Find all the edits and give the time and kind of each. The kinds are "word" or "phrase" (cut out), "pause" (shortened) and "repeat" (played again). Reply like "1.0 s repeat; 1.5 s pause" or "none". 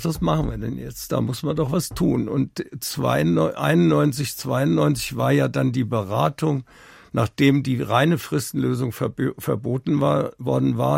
none